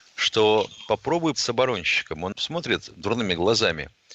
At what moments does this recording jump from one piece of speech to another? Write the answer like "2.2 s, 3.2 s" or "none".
1.3 s, 2.3 s